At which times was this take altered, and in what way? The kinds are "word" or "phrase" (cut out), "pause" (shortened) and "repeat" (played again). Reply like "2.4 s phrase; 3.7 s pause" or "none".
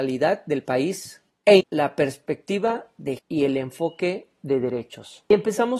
1.6 s word; 3.2 s word